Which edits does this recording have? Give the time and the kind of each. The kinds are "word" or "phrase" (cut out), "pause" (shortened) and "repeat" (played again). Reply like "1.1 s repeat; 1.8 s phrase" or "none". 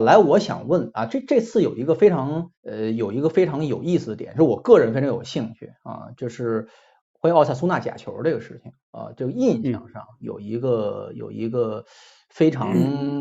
2.5 s pause; 8.8 s pause